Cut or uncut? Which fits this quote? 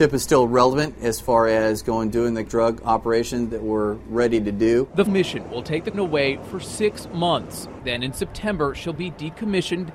cut